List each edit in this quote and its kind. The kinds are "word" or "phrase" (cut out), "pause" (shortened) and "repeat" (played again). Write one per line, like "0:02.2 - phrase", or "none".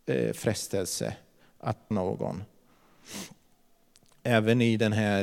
0:01.9 - word